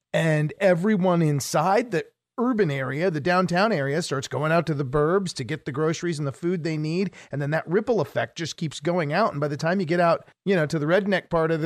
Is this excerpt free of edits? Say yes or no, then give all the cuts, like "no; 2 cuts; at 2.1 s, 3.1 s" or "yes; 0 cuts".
yes; 0 cuts